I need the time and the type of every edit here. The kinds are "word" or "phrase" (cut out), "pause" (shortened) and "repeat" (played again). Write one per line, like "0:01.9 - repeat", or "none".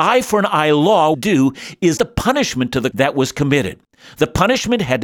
0:01.1 - phrase
0:02.0 - word
0:02.9 - word